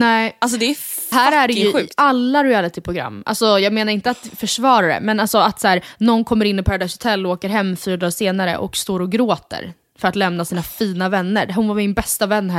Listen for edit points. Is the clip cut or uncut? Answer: cut